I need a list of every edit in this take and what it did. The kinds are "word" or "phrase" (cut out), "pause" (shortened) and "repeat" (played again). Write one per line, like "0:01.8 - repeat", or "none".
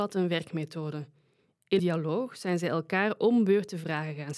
0:01.8 - phrase

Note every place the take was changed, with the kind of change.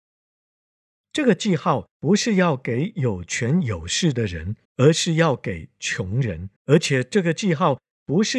0:01.9 - pause
0:04.6 - pause
0:06.6 - pause

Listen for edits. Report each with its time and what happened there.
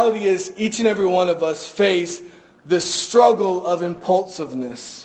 none

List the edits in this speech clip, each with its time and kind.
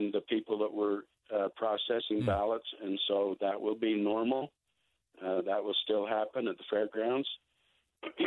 none

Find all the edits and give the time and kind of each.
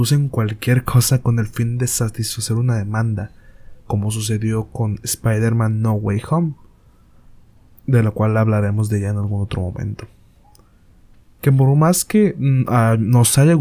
0:03.8 - pause

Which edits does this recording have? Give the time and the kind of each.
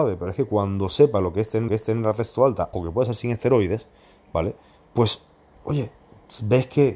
0:01.7 - repeat
0:02.7 - word
0:04.8 - pause

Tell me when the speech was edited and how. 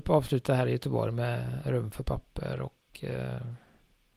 none

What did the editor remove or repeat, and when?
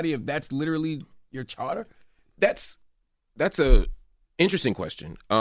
none

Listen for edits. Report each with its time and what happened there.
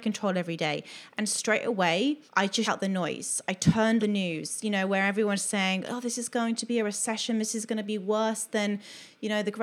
0:02.3 - pause
0:02.6 - word
0:04.0 - word

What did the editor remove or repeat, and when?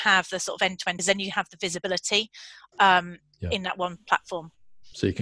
0:01.0 - phrase

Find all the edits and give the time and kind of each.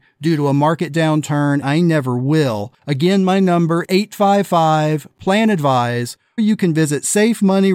0:01.6 - word
0:02.8 - pause
0:03.8 - word
0:06.4 - word

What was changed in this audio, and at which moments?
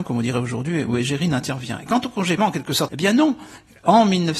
0:02.4 - phrase
0:02.9 - word

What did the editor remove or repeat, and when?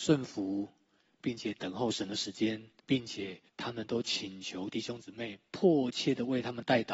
0:02.8 - pause
0:03.5 - pause

